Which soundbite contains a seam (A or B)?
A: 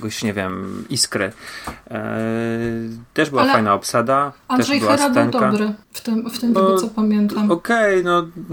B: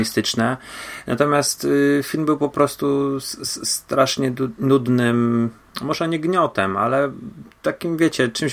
A